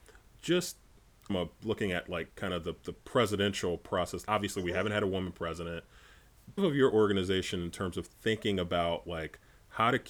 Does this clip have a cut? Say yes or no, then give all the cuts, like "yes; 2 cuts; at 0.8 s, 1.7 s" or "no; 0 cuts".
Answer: yes; 4 cuts; at 1.3 s, 2.3 s, 4.2 s, 6.6 s